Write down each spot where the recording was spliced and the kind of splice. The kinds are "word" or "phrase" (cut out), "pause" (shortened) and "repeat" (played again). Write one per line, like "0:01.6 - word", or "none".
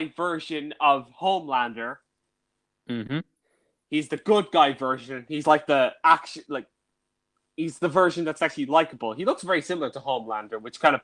none

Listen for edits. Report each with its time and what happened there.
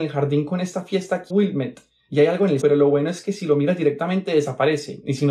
0:01.3 - word
0:02.6 - word

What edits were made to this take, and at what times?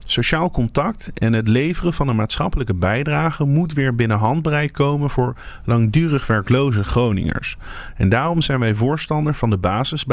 none

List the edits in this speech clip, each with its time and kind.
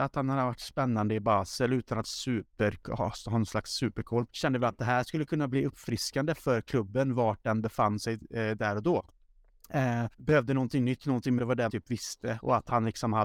0:02.0 - phrase
0:04.3 - phrase
0:10.1 - pause
0:11.4 - phrase
0:11.7 - word

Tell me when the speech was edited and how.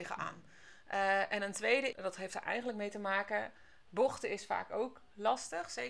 0:01.9 - word

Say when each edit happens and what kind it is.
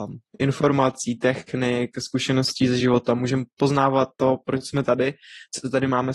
none

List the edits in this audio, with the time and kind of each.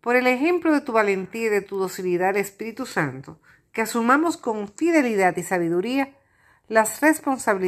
none

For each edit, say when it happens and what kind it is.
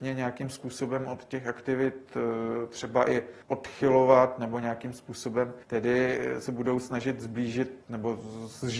0:03.4 - pause
0:05.6 - pause
0:07.8 - pause

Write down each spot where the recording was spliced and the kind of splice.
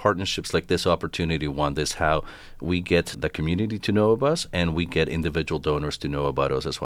0:03.1 - word

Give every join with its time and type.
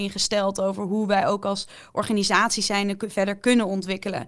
none

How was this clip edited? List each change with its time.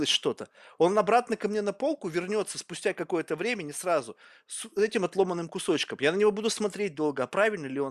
none

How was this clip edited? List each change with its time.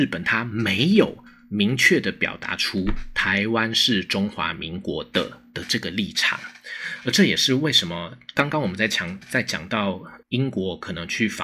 0:10.2 - pause

